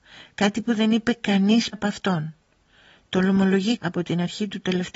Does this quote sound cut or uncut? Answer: cut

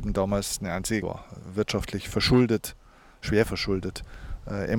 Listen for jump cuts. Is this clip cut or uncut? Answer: cut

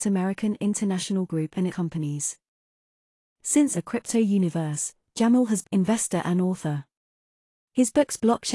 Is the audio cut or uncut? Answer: cut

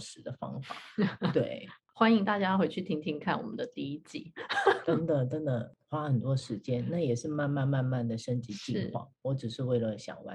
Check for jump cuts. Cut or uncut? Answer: uncut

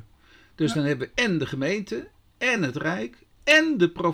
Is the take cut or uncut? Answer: uncut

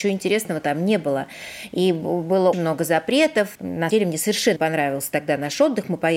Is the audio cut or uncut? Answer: cut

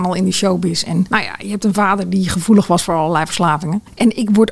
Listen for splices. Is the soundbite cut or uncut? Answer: uncut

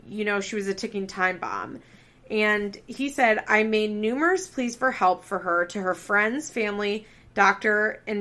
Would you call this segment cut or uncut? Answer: uncut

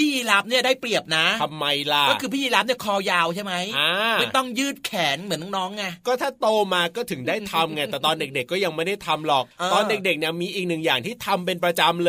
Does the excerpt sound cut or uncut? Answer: cut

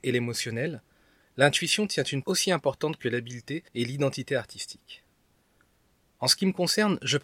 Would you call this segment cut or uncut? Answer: cut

